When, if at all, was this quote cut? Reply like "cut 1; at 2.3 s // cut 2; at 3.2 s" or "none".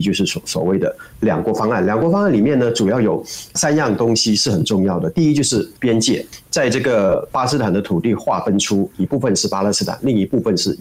cut 1; at 5.8 s